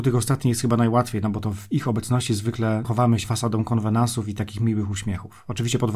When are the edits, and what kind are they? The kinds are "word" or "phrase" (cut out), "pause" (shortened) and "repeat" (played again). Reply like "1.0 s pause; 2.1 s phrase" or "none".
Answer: 2.8 s word; 3.2 s word